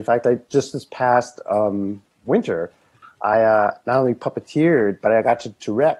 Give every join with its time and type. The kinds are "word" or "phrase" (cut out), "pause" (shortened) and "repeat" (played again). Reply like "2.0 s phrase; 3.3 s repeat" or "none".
none